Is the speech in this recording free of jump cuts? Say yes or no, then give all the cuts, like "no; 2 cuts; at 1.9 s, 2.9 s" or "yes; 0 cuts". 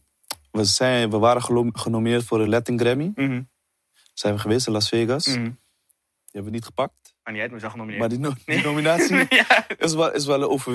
yes; 0 cuts